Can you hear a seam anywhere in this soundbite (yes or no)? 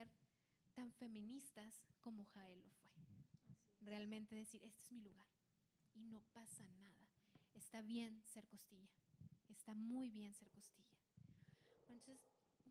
no